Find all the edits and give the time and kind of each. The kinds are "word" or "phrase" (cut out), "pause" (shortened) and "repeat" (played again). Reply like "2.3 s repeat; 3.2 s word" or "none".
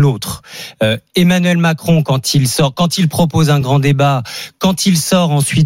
none